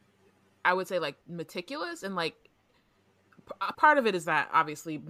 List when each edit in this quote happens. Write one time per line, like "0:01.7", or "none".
0:01.2
0:03.7